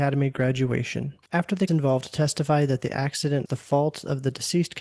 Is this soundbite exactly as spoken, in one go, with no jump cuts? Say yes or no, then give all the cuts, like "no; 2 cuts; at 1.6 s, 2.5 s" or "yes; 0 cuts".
no; 3 cuts; at 1.2 s, 1.7 s, 3.5 s